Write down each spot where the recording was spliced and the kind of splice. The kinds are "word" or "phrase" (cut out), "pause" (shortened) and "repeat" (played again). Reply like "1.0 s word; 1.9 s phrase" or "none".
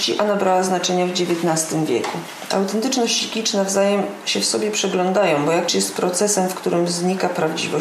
5.7 s phrase